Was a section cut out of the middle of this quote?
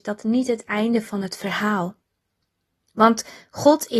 no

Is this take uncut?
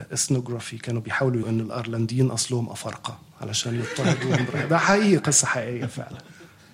no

